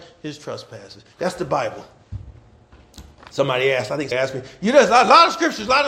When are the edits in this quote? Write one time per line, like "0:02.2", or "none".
0:04.1